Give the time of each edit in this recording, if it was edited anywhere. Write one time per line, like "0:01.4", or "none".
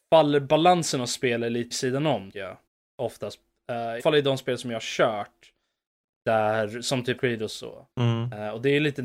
0:01.7
0:02.3
0:02.7
0:04.0
0:07.2
0:07.9

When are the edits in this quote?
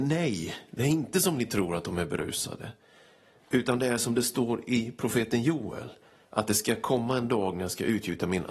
none

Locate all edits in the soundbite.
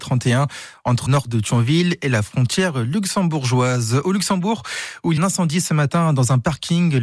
0:01.1
0:05.2

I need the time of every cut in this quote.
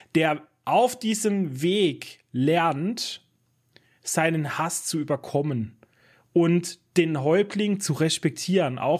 none

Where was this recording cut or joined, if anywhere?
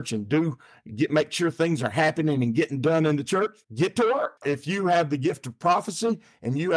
0:03.6
0:04.4

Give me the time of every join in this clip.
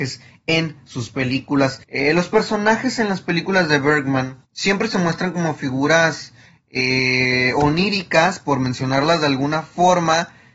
0:01.8
0:04.4

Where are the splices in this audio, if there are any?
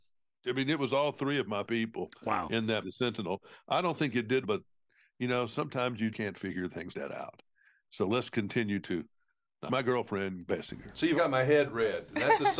0:01.7
0:02.8
0:04.4
0:06.1
0:06.9
0:08.8
0:09.7
0:10.5
0:11.1

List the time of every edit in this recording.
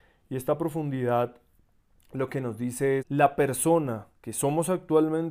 0:03.0
0:04.1

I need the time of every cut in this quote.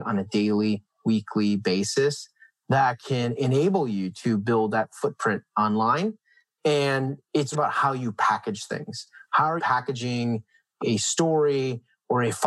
0:07.5
0:09.6

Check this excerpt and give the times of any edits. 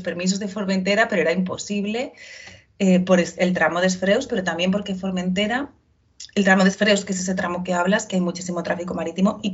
none

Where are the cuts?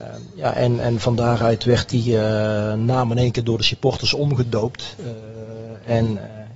none

